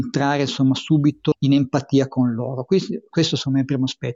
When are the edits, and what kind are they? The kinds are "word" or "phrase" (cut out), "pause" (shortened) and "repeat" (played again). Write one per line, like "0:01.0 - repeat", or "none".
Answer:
0:01.3 - word

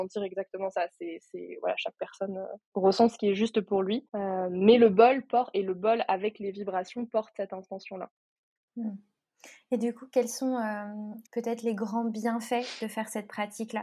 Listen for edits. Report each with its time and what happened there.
0:02.7 - pause
0:04.1 - pause
0:11.3 - pause

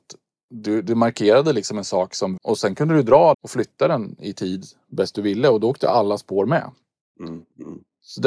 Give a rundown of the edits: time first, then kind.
0:02.4 - word
0:03.3 - word

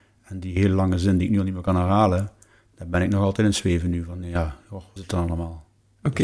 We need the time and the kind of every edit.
0:05.0 - word

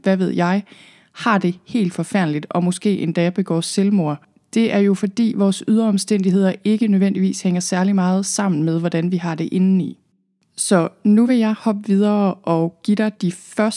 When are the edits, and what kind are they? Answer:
none

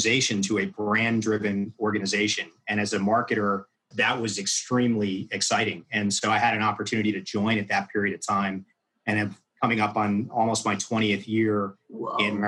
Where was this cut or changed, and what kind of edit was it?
0:03.9 - word

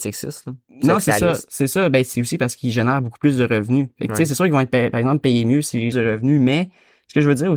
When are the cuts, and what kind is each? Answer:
0:02.1 - word
0:05.9 - phrase

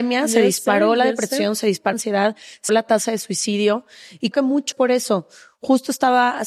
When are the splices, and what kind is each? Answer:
0:01.9 - word
0:02.7 - word
0:04.3 - word
0:04.7 - word

